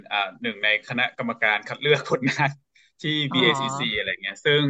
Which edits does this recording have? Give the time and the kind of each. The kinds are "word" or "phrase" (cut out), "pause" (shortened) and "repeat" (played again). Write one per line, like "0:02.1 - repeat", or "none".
none